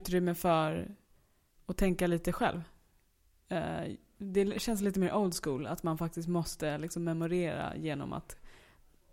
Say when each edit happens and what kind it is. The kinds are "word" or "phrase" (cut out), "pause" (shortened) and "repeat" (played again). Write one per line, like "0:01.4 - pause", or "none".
none